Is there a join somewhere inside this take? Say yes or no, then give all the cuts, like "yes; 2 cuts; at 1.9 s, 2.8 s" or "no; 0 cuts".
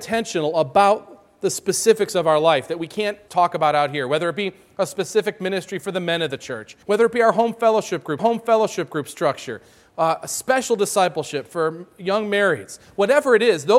yes; 3 cuts; at 3.3 s, 6.8 s, 8.2 s